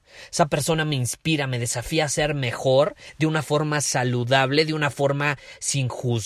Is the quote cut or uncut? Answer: uncut